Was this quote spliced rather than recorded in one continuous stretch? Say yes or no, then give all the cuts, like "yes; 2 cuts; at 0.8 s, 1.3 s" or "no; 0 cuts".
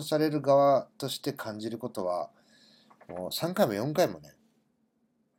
no; 0 cuts